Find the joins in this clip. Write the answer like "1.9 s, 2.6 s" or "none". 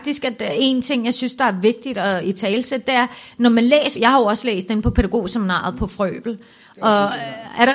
3.9 s